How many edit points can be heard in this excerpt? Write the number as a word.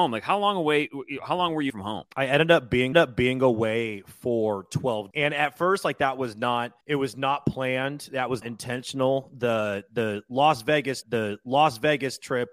seven